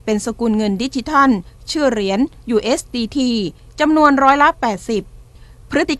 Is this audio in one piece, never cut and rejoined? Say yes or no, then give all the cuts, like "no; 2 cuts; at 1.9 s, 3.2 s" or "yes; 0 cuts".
yes; 0 cuts